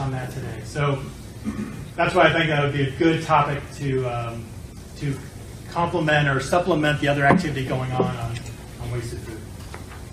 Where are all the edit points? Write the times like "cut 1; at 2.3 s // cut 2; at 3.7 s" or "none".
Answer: none

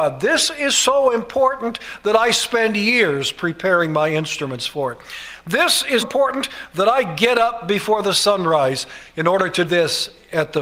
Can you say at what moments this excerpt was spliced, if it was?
cut 1; at 6.0 s // cut 2; at 9.7 s

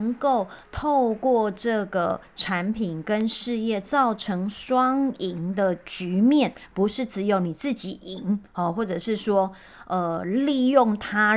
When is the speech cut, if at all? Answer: cut 1; at 8.5 s

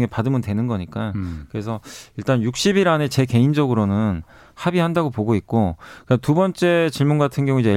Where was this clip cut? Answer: none

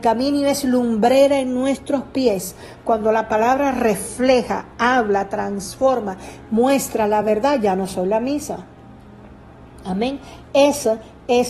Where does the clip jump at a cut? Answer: none

